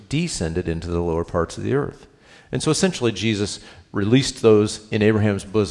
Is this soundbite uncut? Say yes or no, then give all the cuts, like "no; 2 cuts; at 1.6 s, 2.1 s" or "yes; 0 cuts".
yes; 0 cuts